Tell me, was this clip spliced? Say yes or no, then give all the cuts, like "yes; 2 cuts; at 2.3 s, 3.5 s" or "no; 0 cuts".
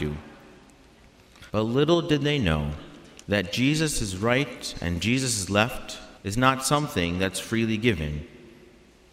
yes; 3 cuts; at 1.5 s, 3.2 s, 6.2 s